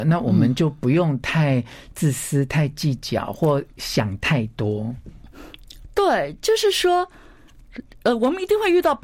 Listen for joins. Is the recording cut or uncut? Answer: uncut